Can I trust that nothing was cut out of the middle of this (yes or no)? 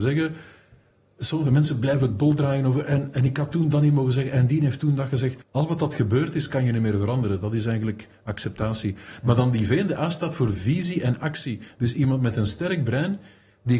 no